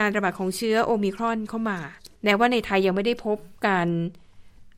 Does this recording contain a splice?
yes; 2 cuts; at 2.2 s, 3.6 s

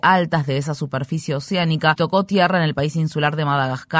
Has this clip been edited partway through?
yes; 1 cut; at 2.0 s

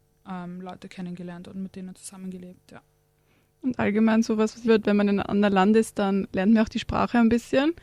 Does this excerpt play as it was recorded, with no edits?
no; 1 cut; at 4.7 s

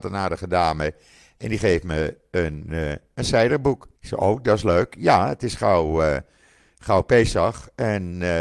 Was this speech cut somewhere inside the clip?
yes; 1 cut; at 4.0 s

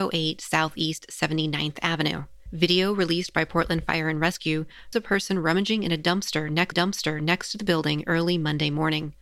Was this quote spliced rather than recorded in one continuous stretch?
yes; 2 cuts; at 4.9 s, 6.7 s

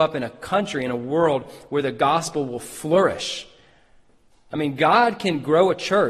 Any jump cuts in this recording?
no; 0 cuts

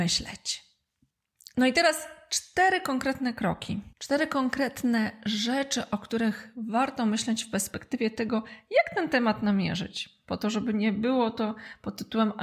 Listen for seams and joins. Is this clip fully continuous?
no; 1 cut; at 3.9 s

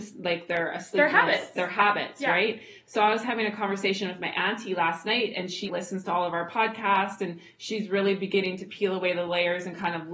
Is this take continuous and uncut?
no; 1 cut; at 5.6 s

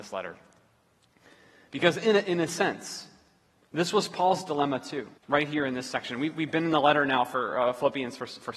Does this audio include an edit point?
yes; 1 cut; at 5.2 s

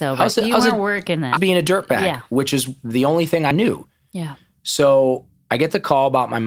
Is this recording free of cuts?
no; 2 cuts; at 1.4 s, 3.5 s

